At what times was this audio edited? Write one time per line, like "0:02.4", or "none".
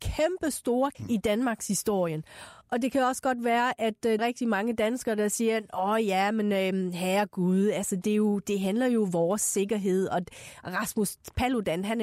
0:00.9
0:02.6
0:04.2

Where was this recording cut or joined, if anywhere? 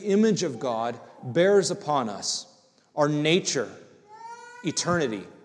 none

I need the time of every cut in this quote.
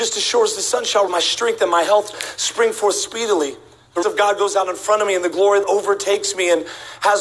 0:01.1
0:02.1
0:04.0
0:05.6

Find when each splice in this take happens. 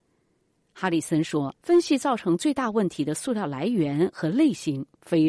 0:01.6

